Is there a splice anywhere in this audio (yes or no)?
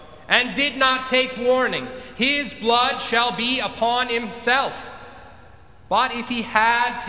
no